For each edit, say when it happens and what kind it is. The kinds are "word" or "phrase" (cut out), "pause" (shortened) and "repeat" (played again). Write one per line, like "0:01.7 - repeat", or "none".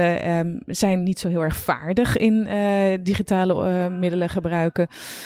none